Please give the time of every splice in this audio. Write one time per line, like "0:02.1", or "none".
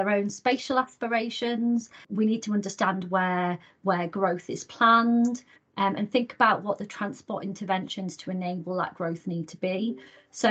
none